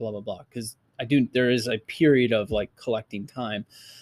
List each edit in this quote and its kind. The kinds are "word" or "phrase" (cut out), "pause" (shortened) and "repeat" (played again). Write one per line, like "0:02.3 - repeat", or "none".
none